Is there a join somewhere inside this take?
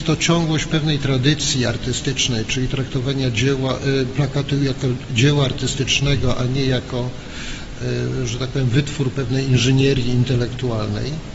no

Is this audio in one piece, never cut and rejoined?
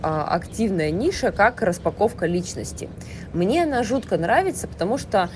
yes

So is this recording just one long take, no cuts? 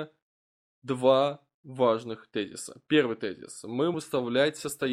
no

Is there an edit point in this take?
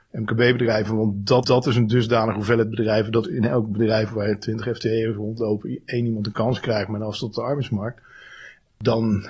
yes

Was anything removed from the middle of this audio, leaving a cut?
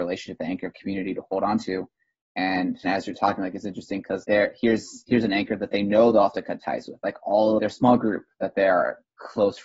yes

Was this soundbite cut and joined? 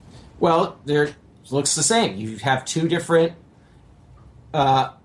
no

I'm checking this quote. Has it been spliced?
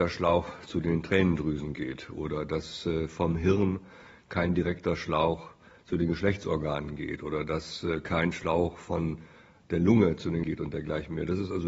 yes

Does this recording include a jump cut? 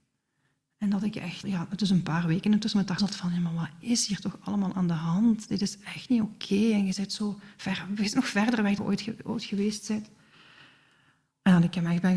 yes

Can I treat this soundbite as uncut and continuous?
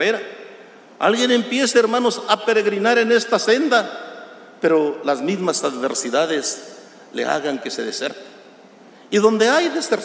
yes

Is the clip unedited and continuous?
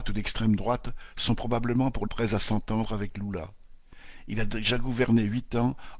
no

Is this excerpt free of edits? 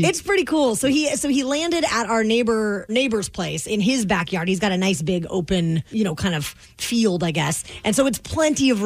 no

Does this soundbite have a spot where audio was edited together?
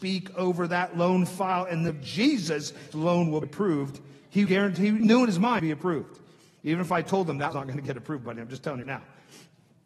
yes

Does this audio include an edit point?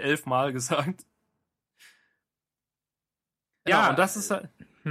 yes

